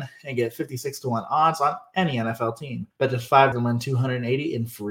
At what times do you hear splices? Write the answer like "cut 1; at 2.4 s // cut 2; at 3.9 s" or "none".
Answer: cut 1; at 2.9 s // cut 2; at 3.5 s